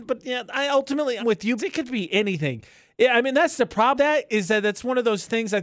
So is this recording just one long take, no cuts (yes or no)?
no